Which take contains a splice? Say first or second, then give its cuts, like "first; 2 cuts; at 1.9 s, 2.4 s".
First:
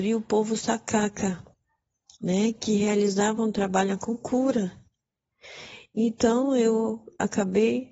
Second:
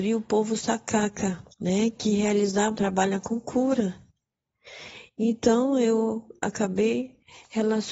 second; 2 cuts; at 1.5 s, 2.8 s